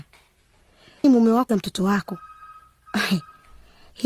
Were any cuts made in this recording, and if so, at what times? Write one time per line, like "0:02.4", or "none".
0:01.0
0:01.5